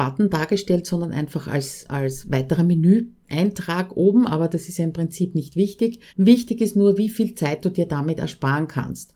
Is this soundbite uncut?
no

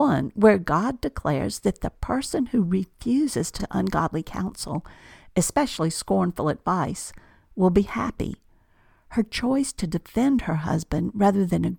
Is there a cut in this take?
yes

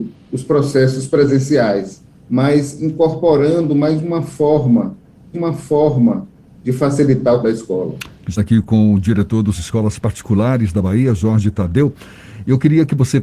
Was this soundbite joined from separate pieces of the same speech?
yes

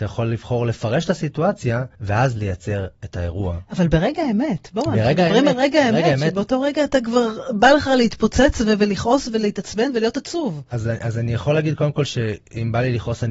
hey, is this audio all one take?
no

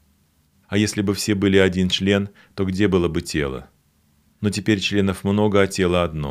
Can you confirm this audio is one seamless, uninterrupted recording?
yes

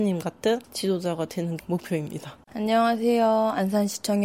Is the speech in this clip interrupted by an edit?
yes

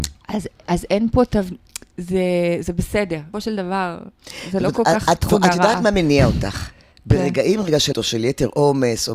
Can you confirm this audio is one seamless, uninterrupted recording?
no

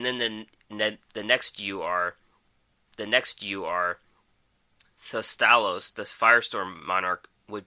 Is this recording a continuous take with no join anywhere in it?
no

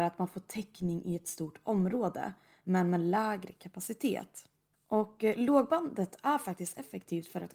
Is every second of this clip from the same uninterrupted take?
yes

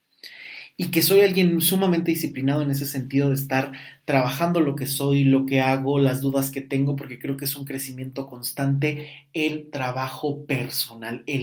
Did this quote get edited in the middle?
no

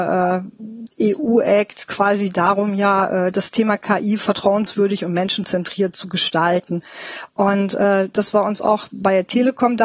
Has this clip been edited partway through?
no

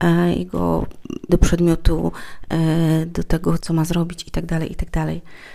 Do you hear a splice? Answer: yes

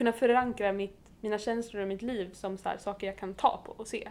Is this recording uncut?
yes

